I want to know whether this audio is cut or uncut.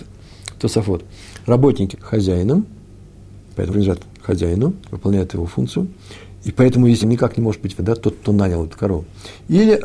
cut